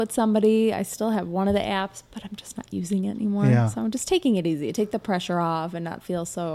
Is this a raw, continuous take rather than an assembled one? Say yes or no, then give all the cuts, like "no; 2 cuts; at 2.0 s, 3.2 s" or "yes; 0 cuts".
yes; 0 cuts